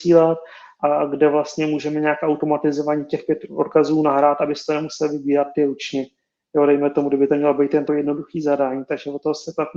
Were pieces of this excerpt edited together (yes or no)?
yes